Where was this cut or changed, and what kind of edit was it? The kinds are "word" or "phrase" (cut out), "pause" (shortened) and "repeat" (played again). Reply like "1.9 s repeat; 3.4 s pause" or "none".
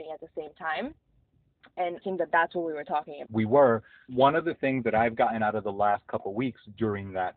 2.0 s word; 3.3 s word; 4.1 s word